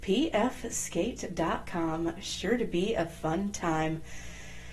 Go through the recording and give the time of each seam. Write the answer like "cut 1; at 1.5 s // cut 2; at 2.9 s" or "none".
none